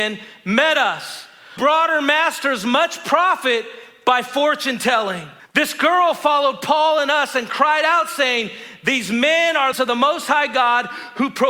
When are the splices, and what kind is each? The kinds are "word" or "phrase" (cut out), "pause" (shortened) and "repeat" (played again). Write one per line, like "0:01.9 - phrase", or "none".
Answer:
0:01.6 - word
0:05.4 - pause
0:09.7 - phrase